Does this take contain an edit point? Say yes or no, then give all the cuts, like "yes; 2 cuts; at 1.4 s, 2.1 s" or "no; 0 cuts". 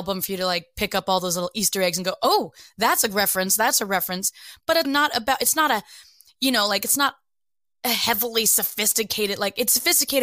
yes; 1 cut; at 4.8 s